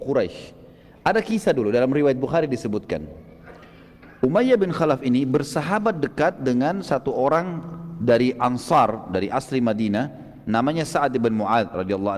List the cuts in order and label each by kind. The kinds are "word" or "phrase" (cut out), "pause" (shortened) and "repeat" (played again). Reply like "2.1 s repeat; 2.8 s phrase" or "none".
none